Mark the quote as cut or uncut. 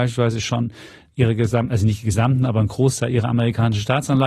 uncut